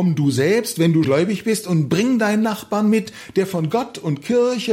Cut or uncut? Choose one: cut